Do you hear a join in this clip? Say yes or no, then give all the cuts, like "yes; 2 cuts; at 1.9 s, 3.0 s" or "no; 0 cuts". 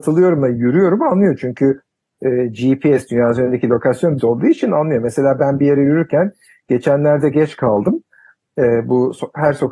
yes; 2 cuts; at 4.2 s, 5.6 s